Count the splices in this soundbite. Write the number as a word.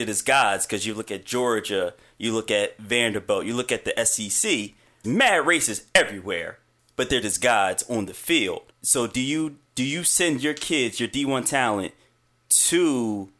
three